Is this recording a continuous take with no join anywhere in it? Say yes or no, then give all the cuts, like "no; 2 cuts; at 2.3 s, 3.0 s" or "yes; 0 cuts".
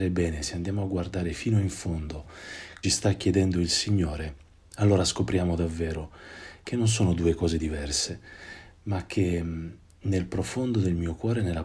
no; 3 cuts; at 2.8 s, 4.6 s, 6.6 s